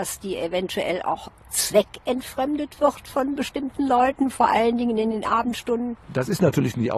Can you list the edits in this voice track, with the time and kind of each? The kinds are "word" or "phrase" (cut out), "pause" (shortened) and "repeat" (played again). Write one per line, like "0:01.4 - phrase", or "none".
none